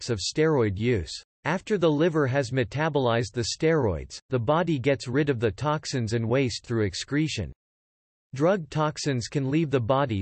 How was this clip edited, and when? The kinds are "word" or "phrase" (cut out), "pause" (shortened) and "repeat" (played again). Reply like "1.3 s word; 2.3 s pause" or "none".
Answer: 1.3 s pause